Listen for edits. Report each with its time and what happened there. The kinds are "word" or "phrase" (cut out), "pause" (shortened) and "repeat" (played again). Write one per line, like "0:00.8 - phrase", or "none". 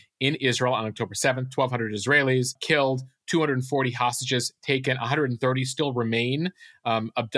none